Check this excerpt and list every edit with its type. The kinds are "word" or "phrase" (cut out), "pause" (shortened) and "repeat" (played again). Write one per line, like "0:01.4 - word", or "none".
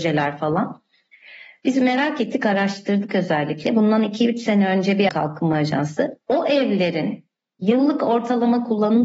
0:05.1 - phrase